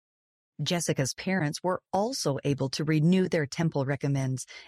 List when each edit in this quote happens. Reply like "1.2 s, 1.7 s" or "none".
none